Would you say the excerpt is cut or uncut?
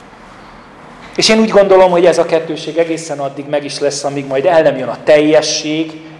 uncut